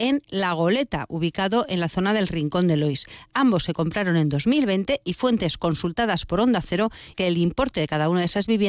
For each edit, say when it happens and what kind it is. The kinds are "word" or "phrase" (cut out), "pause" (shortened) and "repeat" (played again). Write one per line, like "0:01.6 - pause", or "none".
0:07.1 - word